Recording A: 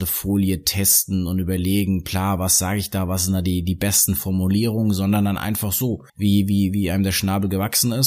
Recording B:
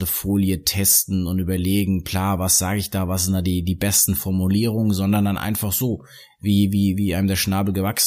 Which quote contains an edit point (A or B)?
A